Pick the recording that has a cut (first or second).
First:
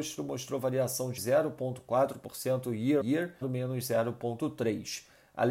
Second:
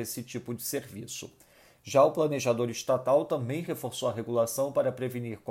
first